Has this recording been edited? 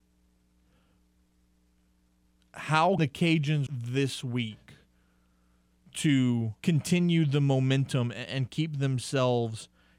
yes; 3 cuts; at 3.0 s, 3.7 s, 6.6 s

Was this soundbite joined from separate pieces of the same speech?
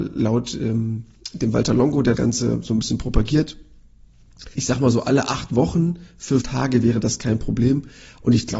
yes; 3 cuts; at 2.1 s, 4.5 s, 6.4 s

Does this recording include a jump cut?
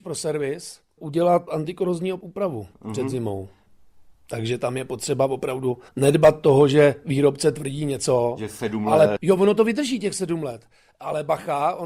yes; 4 cuts; at 1.5 s, 2.7 s, 5.9 s, 9.2 s

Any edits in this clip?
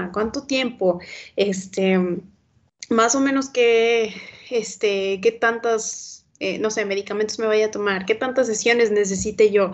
yes; 1 cut; at 6.3 s

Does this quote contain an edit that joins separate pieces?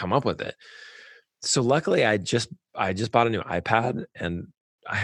no; 0 cuts

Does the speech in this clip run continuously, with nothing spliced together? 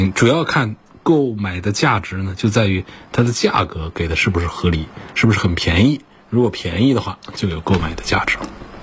yes; 0 cuts

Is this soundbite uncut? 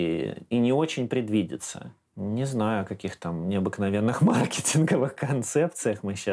yes; 0 cuts

